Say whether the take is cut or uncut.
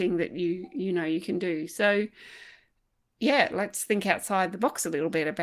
uncut